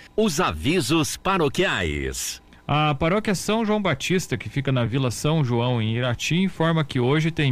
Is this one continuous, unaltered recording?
yes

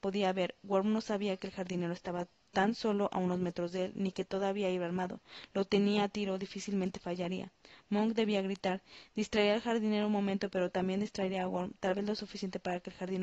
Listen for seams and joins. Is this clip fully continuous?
yes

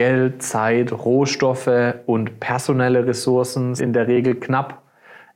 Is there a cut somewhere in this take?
yes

